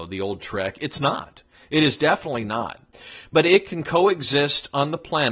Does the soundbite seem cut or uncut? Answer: uncut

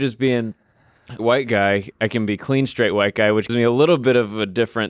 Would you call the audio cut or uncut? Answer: cut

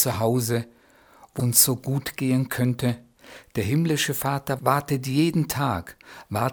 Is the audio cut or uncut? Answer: cut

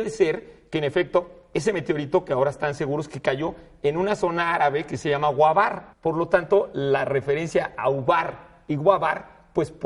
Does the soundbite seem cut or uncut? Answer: cut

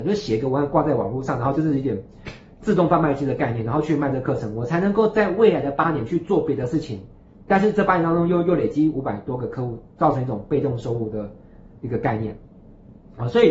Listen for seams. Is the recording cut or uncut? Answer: uncut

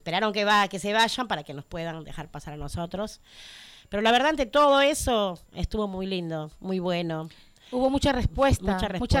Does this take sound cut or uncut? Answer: uncut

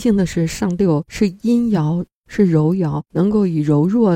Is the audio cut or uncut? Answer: cut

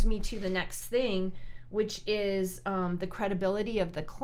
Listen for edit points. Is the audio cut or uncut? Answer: uncut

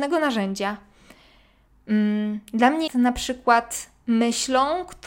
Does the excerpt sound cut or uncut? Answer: cut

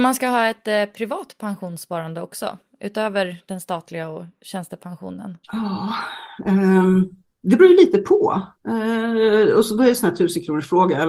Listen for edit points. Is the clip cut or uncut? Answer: cut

